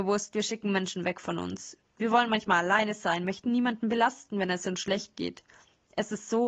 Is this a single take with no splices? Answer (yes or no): yes